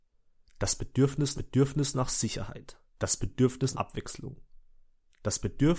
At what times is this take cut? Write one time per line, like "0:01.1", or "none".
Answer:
0:01.4
0:02.9
0:03.7